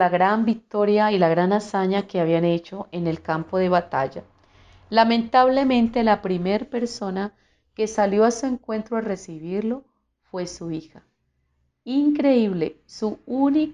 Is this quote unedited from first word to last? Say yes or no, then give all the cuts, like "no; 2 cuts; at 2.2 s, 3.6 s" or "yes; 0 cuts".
yes; 0 cuts